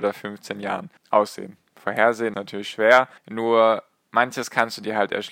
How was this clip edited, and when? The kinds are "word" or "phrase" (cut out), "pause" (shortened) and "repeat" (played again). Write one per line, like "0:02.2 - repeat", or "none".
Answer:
0:01.0 - pause
0:02.3 - word
0:03.2 - pause